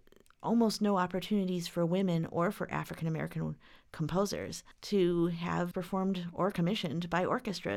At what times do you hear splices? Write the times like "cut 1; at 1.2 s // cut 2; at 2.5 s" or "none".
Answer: cut 1; at 4.7 s // cut 2; at 5.7 s